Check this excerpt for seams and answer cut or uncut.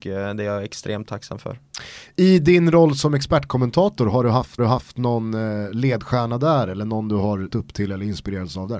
cut